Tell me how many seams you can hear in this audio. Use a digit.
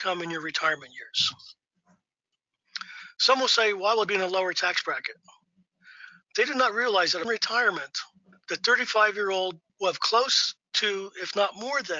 4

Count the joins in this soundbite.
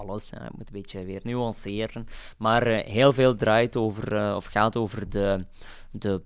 0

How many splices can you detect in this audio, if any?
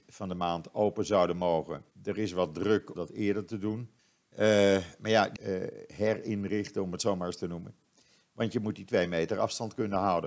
4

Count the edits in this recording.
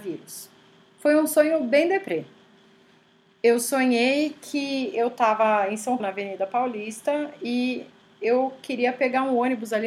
1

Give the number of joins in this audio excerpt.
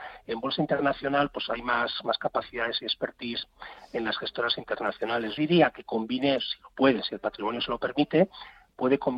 1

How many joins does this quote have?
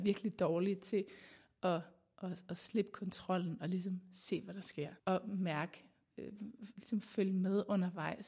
1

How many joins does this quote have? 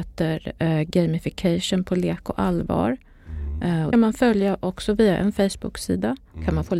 1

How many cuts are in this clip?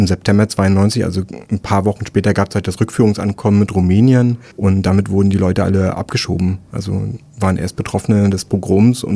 2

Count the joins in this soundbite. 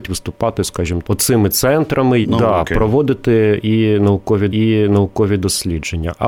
3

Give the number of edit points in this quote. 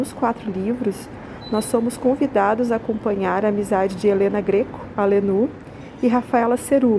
0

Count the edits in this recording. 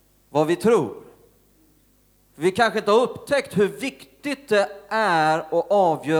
0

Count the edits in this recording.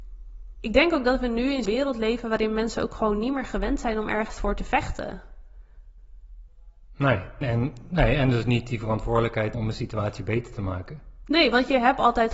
4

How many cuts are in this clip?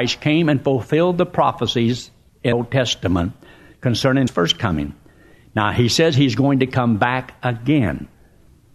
2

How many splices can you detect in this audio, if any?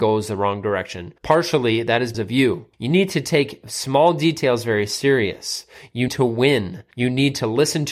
5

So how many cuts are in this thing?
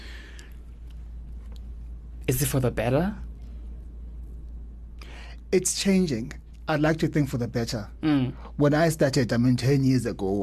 0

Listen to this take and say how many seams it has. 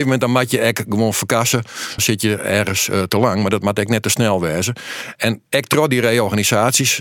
3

